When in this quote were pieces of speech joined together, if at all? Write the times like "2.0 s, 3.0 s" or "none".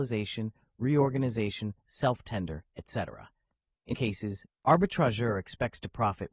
1.9 s, 3.9 s, 4.5 s